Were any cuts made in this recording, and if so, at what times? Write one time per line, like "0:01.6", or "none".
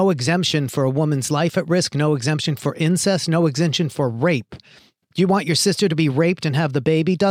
none